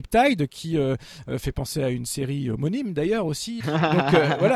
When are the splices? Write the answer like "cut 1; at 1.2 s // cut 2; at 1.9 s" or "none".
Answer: cut 1; at 3.6 s